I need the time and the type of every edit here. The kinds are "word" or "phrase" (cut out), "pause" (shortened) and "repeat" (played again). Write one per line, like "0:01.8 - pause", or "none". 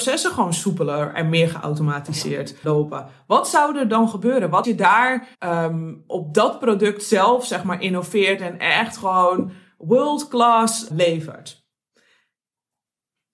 0:02.6 - word
0:04.6 - word
0:05.3 - pause
0:10.9 - word

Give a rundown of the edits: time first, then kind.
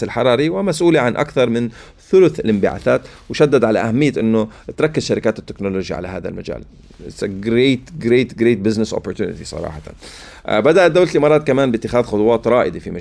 none

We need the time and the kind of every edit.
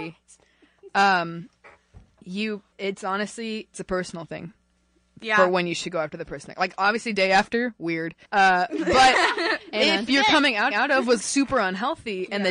0:02.7 - pause
0:03.7 - word
0:08.2 - pause
0:10.1 - phrase
0:10.7 - repeat
0:11.2 - word

